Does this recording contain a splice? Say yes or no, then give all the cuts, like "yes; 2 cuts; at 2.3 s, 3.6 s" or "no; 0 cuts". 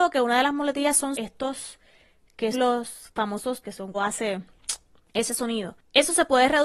yes; 4 cuts; at 1.1 s, 2.5 s, 3.6 s, 3.9 s